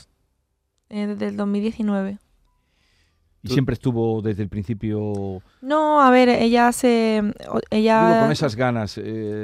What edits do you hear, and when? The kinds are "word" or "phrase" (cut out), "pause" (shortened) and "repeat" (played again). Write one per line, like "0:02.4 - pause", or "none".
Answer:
none